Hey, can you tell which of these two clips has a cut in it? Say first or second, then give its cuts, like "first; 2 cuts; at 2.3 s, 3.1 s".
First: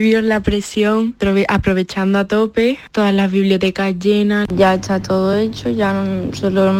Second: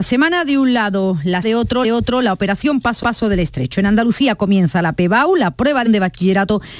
second; 4 cuts; at 1.4 s, 1.8 s, 3.0 s, 5.9 s